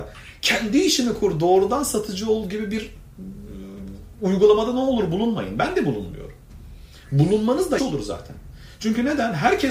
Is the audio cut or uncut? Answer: cut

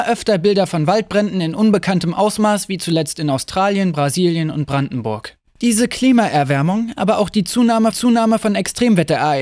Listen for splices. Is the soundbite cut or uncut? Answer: cut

